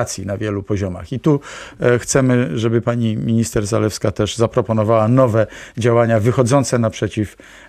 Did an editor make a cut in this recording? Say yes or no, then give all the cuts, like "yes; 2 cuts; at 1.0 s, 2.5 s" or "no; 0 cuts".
no; 0 cuts